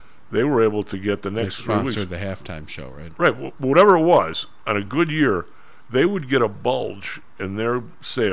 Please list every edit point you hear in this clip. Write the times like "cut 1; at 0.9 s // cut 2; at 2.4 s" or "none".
none